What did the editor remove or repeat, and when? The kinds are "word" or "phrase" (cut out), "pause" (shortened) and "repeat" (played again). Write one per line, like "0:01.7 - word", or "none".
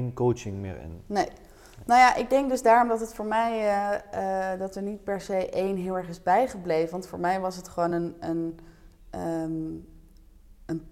none